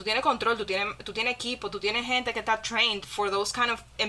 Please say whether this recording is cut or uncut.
uncut